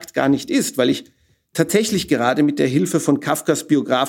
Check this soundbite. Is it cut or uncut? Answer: uncut